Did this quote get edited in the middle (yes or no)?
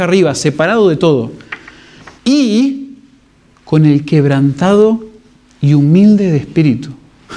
yes